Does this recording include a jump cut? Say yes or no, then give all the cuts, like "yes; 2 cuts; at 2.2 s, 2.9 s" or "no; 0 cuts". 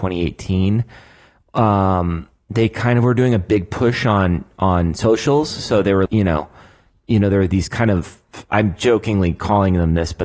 yes; 1 cut; at 6.1 s